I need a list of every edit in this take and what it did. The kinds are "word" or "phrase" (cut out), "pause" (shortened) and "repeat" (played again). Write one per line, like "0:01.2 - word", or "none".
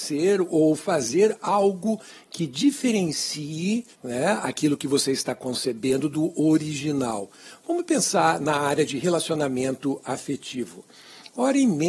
0:03.9 - pause